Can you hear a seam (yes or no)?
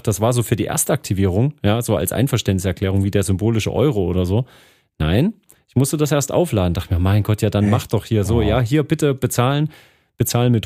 no